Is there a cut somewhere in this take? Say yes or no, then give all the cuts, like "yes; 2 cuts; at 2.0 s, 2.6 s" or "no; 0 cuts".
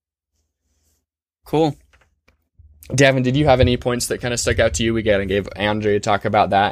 no; 0 cuts